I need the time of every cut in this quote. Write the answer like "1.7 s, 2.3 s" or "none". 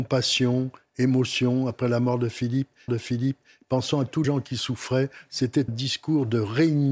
2.9 s, 4.2 s, 5.7 s